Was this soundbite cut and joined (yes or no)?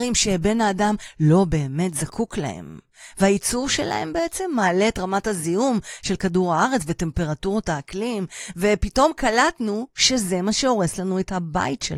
no